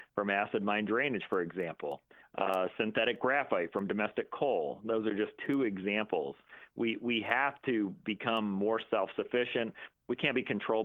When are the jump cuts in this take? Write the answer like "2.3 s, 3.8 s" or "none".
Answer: none